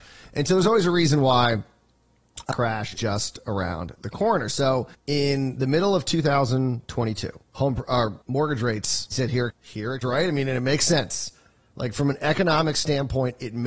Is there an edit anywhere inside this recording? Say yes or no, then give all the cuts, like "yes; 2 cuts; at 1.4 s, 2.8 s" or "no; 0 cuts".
yes; 8 cuts; at 2.5 s, 3.0 s, 4.9 s, 7.4 s, 8.2 s, 9.1 s, 9.5 s, 10.0 s